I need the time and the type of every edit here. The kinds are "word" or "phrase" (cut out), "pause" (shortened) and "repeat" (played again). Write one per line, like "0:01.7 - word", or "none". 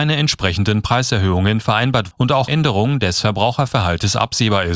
0:02.1 - word
0:02.5 - word